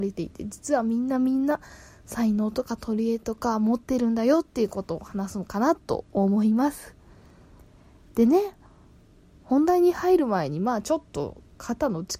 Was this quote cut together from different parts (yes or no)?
no